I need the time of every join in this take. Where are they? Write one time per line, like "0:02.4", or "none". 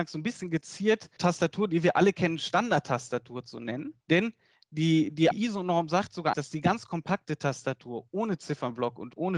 0:01.2
0:04.0
0:05.3
0:06.3